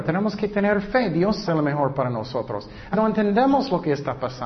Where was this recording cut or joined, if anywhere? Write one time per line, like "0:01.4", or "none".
0:01.5
0:02.9